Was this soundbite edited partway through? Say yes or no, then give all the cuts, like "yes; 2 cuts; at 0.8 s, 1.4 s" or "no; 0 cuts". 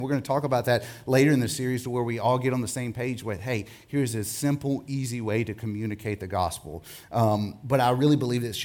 no; 0 cuts